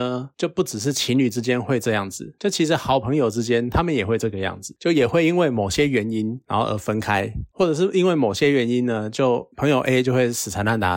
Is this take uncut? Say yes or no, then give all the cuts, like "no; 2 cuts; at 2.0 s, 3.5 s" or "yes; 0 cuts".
yes; 0 cuts